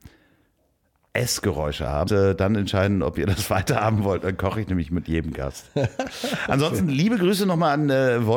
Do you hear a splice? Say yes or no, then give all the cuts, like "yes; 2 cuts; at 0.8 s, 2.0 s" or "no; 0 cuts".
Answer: yes; 1 cut; at 2.1 s